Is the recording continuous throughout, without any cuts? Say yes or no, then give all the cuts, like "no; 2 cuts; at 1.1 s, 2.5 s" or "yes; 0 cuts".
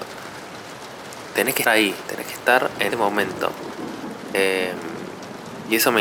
no; 2 cuts; at 1.6 s, 2.9 s